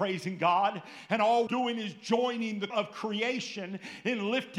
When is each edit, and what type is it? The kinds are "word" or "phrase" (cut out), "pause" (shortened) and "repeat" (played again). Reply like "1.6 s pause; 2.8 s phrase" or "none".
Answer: 1.5 s word; 2.7 s word

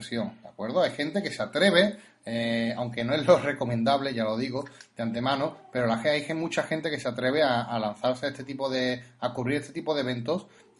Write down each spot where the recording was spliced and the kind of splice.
none

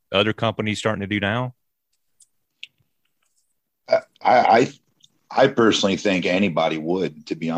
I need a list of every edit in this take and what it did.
none

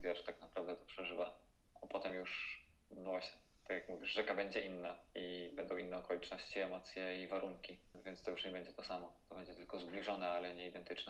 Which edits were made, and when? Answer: none

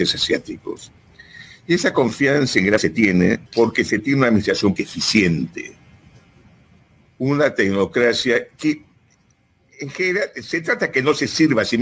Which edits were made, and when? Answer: 2.8 s word; 3.5 s pause; 4.8 s word; 8.5 s pause

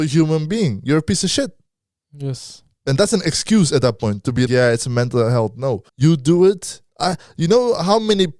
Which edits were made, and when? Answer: 1.7 s pause; 4.5 s word; 5.9 s pause; 6.9 s pause

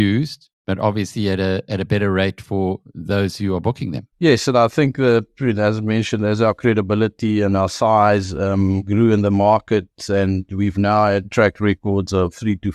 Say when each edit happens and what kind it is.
4.1 s pause

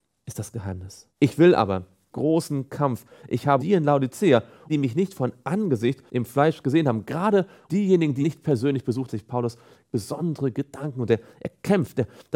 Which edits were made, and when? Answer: 1.1 s pause; 2.1 s phrase; 3.6 s phrase; 4.7 s phrase; 6.1 s pause; 7.7 s word; 8.2 s word; 9.1 s phrase

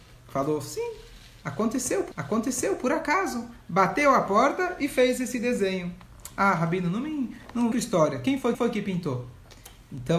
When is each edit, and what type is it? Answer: 2.1 s repeat; 7.7 s phrase; 8.5 s repeat

